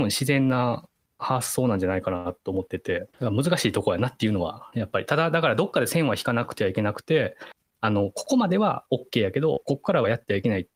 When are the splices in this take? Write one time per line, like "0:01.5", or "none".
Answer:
0:03.1